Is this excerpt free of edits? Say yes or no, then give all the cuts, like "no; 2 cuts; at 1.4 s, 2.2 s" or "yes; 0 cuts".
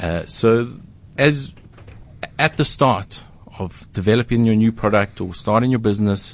yes; 0 cuts